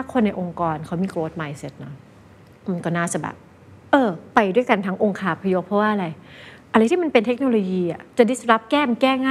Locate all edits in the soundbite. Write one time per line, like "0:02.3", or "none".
none